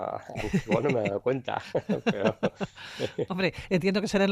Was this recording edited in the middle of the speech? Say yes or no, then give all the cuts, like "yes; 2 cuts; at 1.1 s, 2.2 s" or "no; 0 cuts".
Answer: no; 0 cuts